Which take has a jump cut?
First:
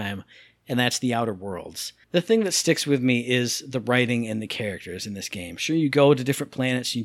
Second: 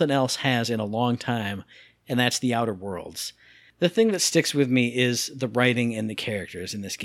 first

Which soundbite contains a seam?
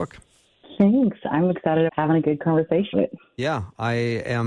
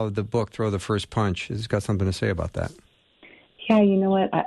first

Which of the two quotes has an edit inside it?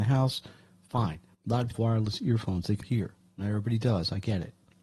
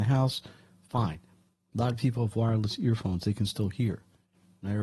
first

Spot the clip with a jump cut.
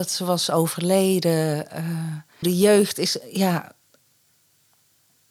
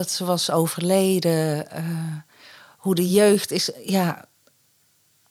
first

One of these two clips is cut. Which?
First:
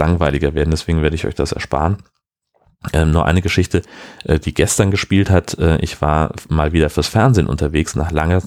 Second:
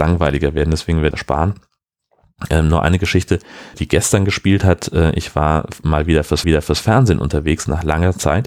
second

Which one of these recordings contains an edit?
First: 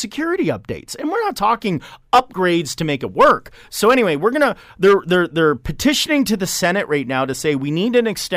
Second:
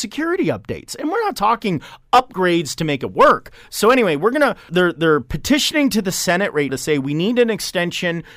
second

